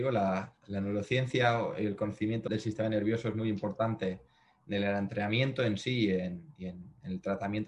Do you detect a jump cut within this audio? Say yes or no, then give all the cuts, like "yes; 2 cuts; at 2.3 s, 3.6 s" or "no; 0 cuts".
yes; 1 cut; at 2.5 s